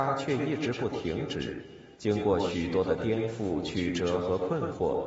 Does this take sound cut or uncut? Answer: cut